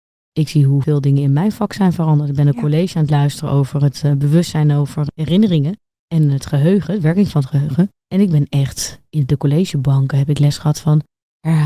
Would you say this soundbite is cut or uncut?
uncut